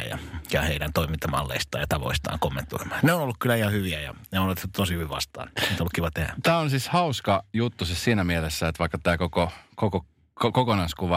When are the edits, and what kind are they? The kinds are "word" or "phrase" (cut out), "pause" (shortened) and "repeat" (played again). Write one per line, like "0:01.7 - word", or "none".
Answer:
none